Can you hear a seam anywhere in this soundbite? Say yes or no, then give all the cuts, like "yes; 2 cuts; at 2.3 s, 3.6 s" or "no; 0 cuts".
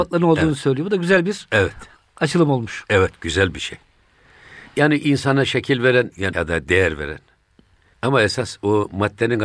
yes; 2 cuts; at 4.7 s, 6.3 s